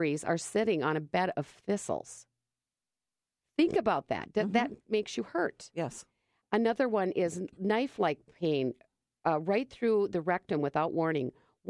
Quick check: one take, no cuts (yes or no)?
yes